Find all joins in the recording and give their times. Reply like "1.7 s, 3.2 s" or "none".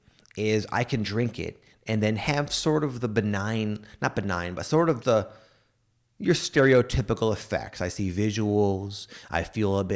5.0 s